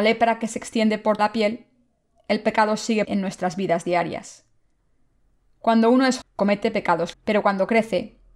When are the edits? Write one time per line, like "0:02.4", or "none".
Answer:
0:01.2
0:03.0
0:06.2
0:07.1